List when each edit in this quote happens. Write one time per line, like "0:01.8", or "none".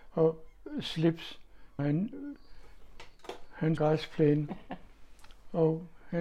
0:01.8
0:03.8